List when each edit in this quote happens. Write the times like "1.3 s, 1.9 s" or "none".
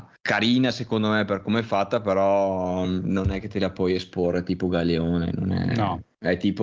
none